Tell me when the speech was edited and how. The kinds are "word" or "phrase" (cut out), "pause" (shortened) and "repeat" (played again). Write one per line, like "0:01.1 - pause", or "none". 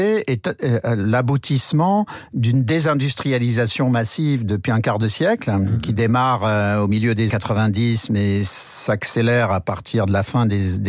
0:07.3 - word